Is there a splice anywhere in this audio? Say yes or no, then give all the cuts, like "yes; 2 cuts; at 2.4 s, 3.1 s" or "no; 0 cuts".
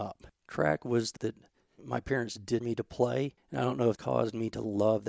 yes; 5 cuts; at 1.2 s, 1.8 s, 2.6 s, 3.4 s, 4.0 s